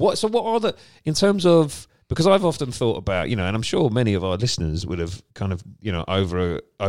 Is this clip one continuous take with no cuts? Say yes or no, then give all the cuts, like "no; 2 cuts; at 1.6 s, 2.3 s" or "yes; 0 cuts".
no; 2 cuts; at 2.0 s, 5.3 s